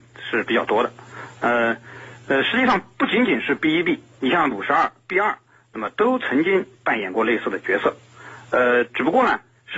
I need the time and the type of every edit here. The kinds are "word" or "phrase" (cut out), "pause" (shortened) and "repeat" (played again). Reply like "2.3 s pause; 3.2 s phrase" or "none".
4.5 s word